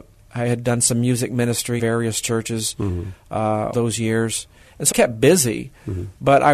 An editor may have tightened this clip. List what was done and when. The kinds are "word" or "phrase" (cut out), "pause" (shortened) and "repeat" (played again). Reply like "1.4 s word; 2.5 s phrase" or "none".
1.8 s word; 3.7 s word; 4.9 s word